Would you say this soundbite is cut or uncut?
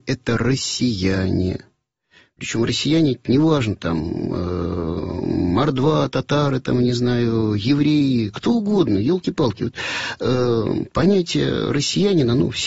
uncut